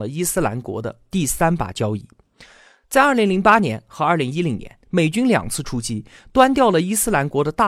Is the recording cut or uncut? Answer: uncut